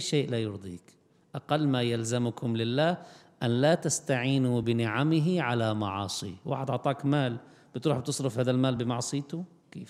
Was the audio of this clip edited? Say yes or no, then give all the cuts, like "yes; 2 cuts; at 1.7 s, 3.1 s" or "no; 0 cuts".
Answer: no; 0 cuts